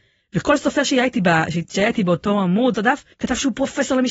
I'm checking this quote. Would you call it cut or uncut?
cut